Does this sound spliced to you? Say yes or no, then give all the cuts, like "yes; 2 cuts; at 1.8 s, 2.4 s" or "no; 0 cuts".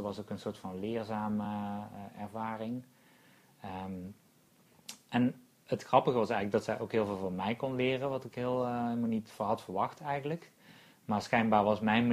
no; 0 cuts